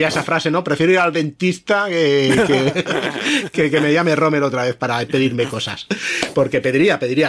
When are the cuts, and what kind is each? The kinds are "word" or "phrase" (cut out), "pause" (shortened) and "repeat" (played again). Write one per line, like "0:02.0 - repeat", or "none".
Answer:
none